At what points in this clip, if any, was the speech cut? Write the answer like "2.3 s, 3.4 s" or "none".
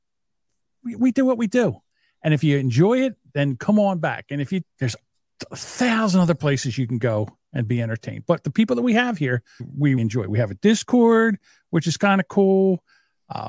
4.6 s, 9.6 s, 10.0 s